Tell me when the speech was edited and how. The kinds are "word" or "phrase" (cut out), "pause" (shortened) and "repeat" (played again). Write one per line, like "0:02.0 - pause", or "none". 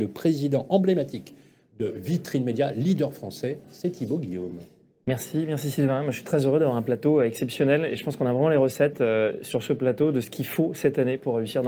none